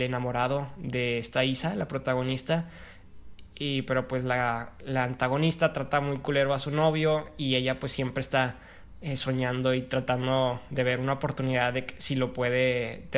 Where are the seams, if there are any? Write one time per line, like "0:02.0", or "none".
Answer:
none